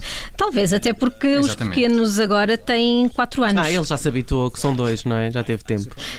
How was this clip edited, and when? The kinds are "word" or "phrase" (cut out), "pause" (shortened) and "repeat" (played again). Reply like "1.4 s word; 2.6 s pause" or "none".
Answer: none